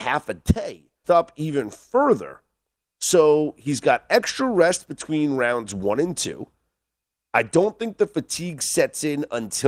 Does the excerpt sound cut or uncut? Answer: cut